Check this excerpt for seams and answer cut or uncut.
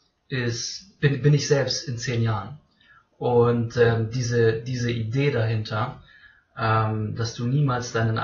uncut